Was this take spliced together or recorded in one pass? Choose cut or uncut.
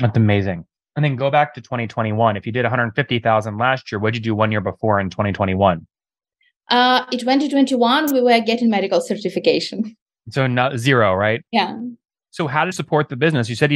cut